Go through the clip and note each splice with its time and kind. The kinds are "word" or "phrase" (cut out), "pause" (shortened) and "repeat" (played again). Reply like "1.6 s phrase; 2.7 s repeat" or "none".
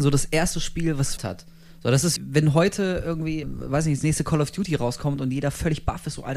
1.2 s phrase; 2.2 s word; 3.4 s word